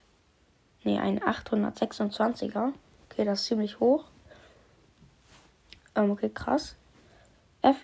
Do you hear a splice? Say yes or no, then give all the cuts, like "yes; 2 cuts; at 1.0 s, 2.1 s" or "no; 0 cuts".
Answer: no; 0 cuts